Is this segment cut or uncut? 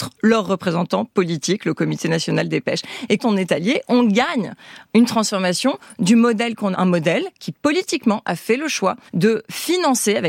cut